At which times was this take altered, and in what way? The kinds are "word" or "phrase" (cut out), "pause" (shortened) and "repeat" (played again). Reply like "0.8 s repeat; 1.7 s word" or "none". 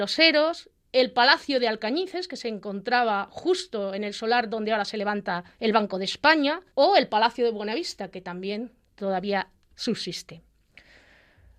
5.5 s pause; 6.7 s pause